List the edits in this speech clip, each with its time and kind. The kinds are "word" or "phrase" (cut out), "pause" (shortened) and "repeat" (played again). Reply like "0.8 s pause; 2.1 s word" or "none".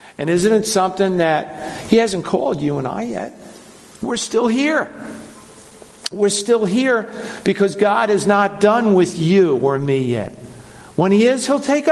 none